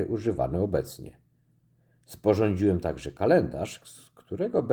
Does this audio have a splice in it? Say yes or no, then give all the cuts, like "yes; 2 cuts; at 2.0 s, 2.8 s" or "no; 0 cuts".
no; 0 cuts